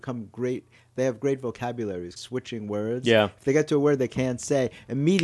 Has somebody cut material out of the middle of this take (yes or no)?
yes